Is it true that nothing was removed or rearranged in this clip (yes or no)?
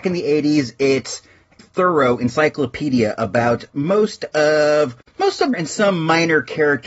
no